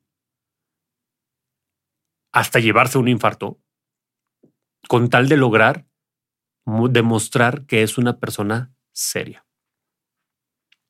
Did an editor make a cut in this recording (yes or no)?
no